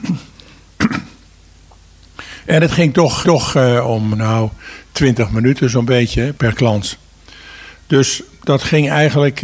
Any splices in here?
yes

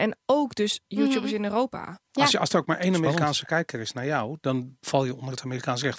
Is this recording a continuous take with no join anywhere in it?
no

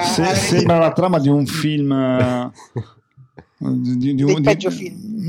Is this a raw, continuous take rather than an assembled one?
yes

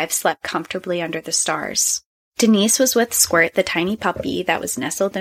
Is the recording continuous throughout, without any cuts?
no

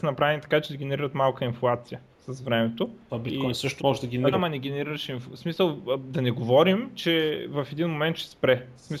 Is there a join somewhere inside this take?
yes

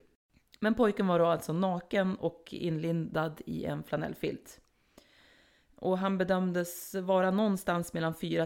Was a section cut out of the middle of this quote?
no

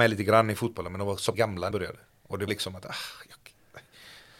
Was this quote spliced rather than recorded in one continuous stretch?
yes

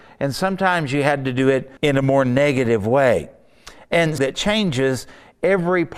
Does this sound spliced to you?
yes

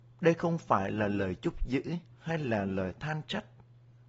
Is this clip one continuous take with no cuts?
no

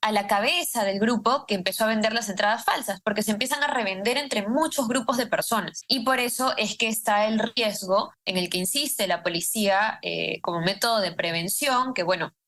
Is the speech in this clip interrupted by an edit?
no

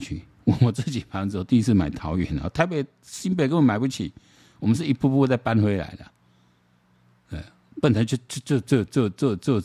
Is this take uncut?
yes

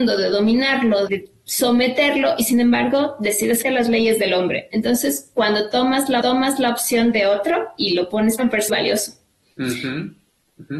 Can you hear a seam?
yes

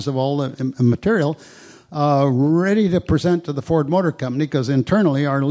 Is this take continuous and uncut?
yes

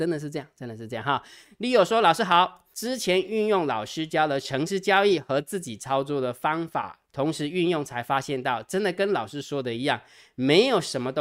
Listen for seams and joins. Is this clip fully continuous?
no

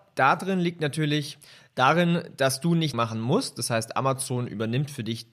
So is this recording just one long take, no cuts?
no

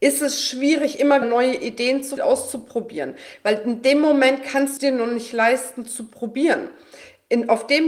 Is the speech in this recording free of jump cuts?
no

